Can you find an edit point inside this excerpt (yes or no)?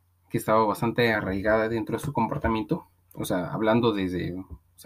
no